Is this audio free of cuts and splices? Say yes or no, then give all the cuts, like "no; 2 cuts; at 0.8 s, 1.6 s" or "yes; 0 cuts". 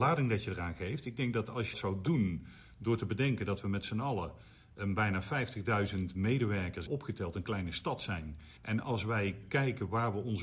no; 4 cuts; at 1.7 s, 6.9 s, 8.6 s, 9.4 s